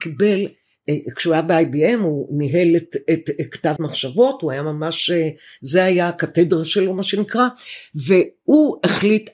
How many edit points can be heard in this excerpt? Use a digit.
1